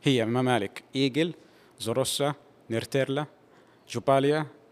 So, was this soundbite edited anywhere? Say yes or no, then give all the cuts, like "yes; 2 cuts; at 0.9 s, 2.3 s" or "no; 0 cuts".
no; 0 cuts